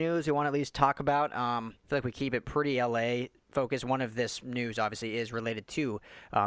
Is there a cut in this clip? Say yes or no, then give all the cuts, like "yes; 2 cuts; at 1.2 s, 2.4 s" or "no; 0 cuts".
yes; 1 cut; at 1.8 s